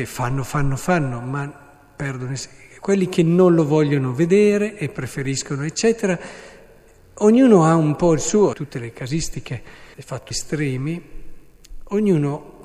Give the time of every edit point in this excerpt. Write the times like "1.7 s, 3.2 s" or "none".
8.5 s, 9.9 s, 10.3 s